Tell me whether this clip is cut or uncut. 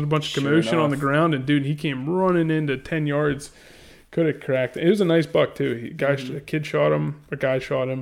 uncut